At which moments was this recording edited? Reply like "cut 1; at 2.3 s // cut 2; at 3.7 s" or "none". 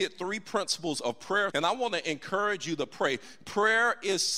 cut 1; at 1.5 s